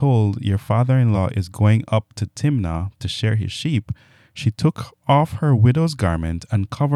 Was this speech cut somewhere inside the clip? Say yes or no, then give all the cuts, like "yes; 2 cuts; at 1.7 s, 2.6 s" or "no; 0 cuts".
no; 0 cuts